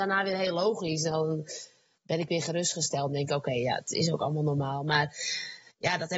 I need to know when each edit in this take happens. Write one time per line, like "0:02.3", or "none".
none

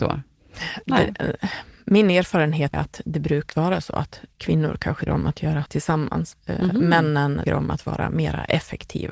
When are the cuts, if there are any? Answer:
0:02.7
0:03.5
0:05.1
0:05.7
0:06.3
0:07.5

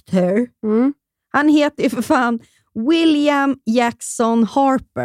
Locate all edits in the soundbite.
none

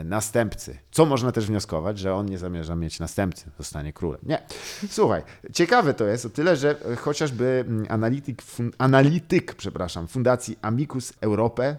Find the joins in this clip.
none

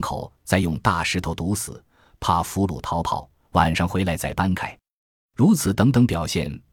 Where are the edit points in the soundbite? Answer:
none

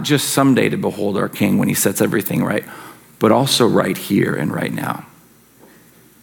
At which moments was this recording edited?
none

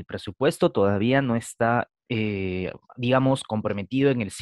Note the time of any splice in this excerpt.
none

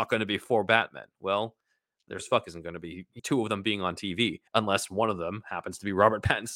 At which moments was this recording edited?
0:02.2
0:03.2
0:04.5

